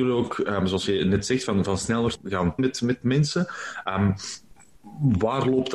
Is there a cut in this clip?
yes; 1 cut; at 2.6 s

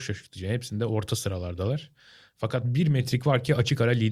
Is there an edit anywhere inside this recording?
no; 0 cuts

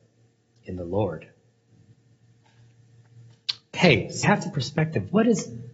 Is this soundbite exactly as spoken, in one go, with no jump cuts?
no; 2 cuts; at 4.2 s, 4.5 s

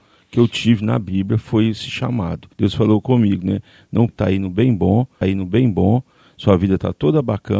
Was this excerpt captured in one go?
no; 3 cuts; at 2.5 s, 4.1 s, 5.2 s

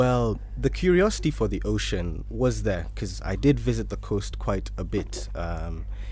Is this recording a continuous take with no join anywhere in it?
yes; 0 cuts

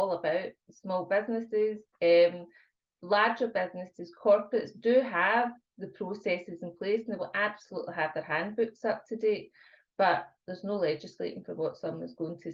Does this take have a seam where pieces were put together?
no; 0 cuts

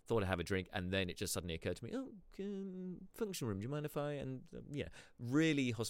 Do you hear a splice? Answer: no; 0 cuts

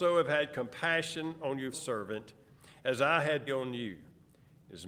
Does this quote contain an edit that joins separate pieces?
yes; 2 cuts; at 1.7 s, 3.5 s

